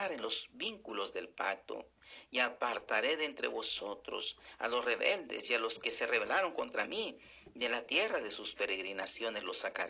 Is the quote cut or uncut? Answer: uncut